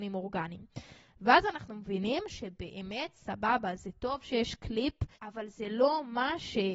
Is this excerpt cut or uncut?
cut